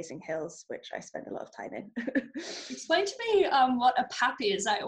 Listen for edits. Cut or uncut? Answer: uncut